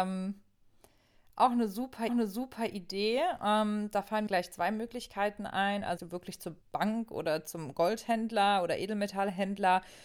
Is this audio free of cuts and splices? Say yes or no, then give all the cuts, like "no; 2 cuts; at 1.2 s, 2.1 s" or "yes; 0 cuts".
no; 4 cuts; at 2.1 s, 4.3 s, 6.0 s, 6.6 s